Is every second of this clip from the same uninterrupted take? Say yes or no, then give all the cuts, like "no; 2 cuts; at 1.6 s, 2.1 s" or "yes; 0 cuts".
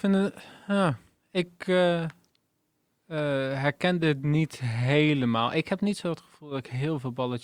yes; 0 cuts